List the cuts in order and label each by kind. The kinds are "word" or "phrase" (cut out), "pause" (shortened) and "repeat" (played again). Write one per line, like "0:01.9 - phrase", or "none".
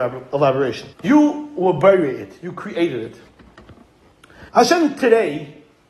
0:00.9 - pause
0:04.5 - pause